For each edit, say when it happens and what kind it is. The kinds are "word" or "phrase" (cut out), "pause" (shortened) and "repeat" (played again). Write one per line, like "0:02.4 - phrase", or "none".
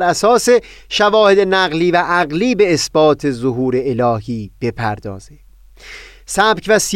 none